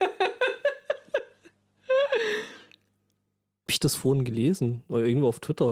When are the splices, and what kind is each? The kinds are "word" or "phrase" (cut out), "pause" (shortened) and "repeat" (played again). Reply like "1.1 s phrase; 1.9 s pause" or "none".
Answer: 3.7 s word